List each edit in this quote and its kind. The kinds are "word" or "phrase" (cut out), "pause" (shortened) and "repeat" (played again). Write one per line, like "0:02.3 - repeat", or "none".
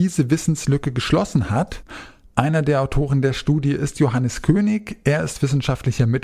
none